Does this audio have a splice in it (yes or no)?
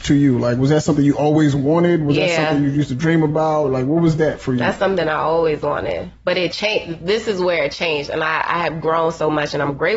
no